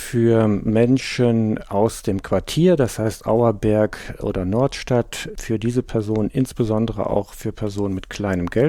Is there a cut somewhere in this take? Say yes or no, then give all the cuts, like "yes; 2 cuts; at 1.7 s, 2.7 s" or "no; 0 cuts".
no; 0 cuts